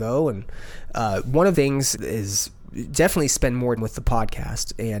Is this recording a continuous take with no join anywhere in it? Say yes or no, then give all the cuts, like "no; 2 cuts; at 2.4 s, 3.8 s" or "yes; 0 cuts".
no; 3 cuts; at 1.5 s, 1.9 s, 3.8 s